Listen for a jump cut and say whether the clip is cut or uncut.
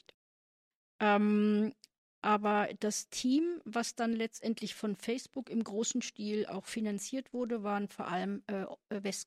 uncut